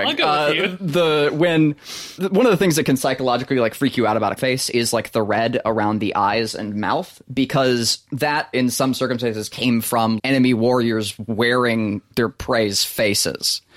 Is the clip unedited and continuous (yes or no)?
no